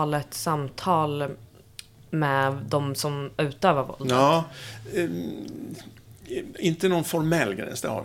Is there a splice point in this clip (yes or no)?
no